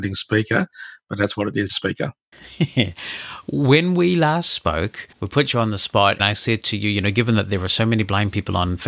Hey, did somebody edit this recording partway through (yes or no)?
yes